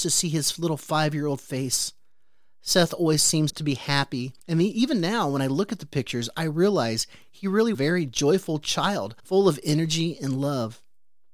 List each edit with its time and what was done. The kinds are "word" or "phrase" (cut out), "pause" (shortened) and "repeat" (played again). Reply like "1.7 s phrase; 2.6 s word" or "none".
3.5 s word; 4.4 s pause; 7.7 s phrase; 9.2 s pause